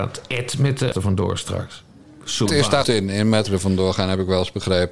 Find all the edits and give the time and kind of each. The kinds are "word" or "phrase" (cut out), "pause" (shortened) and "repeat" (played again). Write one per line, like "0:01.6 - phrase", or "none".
0:00.9 - word
0:02.5 - word
0:02.8 - word
0:03.5 - word